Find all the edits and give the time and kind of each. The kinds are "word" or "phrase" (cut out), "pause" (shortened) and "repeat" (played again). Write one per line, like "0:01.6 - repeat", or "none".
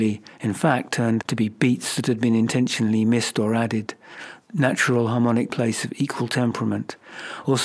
0:01.2 - word
0:05.5 - phrase